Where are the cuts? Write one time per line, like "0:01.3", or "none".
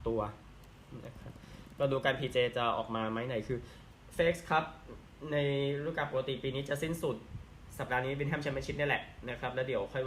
none